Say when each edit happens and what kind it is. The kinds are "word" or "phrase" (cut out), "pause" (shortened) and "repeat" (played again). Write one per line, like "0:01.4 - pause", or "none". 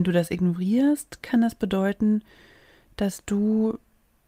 none